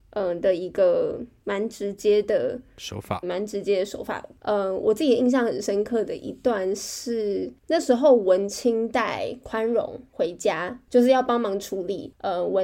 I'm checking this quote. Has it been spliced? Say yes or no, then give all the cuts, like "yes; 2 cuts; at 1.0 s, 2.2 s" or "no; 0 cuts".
yes; 1 cut; at 3.2 s